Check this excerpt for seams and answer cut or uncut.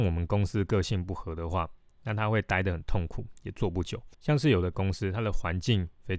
cut